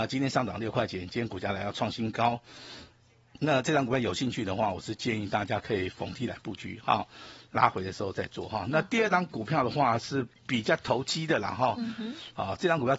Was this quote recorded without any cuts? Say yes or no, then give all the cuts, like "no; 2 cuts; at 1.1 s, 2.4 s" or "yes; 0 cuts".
yes; 0 cuts